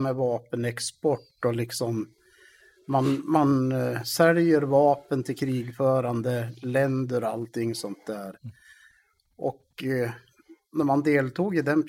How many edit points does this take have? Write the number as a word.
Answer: zero